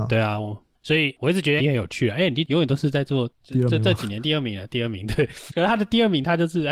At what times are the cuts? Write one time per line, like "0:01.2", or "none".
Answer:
0:01.6
0:05.5